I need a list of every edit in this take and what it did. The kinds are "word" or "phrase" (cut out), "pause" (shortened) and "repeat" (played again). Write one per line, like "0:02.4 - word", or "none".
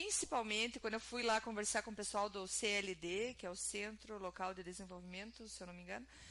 none

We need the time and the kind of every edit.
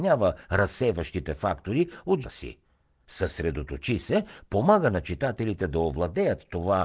0:02.2 - word

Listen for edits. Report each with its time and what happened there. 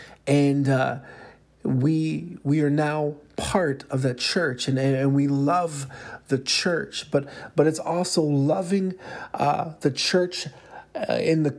none

